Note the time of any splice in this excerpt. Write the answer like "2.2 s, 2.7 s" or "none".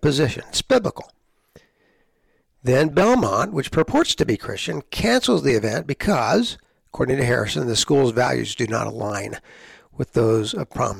none